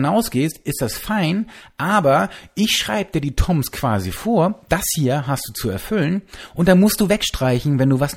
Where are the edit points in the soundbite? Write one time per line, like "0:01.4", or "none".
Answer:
none